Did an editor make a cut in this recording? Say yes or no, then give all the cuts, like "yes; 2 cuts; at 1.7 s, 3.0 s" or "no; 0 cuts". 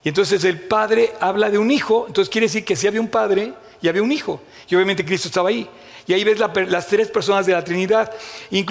no; 0 cuts